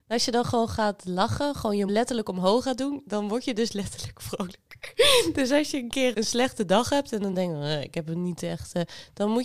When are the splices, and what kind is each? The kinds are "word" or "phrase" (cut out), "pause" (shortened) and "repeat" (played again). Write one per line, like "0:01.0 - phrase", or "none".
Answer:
0:01.9 - word
0:06.1 - word